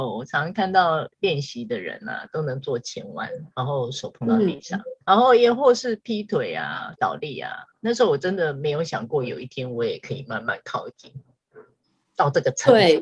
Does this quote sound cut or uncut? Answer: cut